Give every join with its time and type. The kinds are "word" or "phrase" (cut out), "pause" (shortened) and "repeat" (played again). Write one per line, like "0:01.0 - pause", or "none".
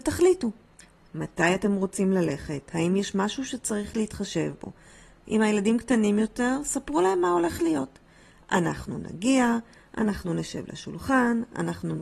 none